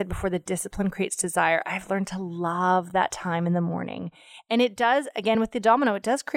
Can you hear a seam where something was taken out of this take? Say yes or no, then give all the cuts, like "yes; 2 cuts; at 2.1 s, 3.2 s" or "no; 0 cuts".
no; 0 cuts